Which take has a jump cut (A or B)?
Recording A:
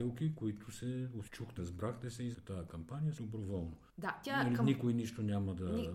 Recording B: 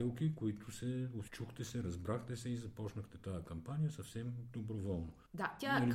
A